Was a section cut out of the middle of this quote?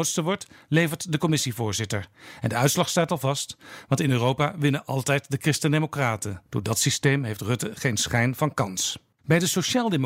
yes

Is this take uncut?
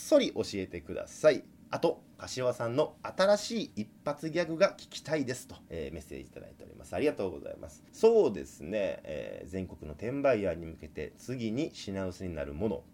no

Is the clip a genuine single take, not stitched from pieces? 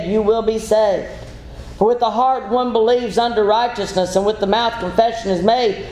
yes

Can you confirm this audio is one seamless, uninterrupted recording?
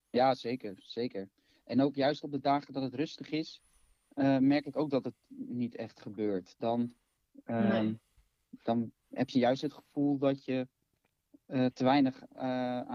yes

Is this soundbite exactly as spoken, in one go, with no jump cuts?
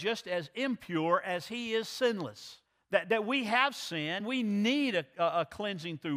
no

